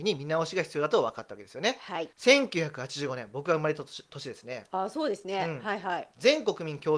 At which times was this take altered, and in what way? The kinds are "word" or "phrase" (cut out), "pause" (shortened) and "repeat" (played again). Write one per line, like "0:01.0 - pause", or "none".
0:02.1 - pause